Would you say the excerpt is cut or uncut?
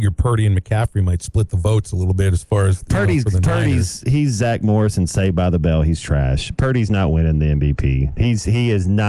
uncut